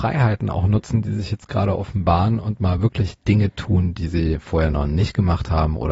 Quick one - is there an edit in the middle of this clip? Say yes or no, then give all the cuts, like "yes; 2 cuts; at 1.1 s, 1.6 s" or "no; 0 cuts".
no; 0 cuts